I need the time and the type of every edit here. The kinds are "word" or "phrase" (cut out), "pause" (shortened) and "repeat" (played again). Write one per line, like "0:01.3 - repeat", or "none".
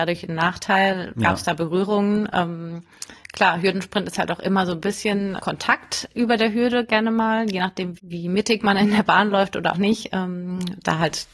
0:05.4 - word
0:08.0 - word
0:09.7 - word